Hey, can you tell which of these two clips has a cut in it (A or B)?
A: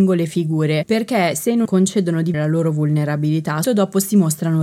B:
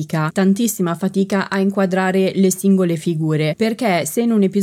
A